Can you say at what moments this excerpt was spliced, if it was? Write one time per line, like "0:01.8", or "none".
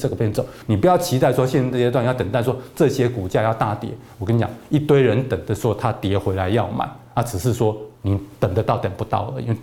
0:07.9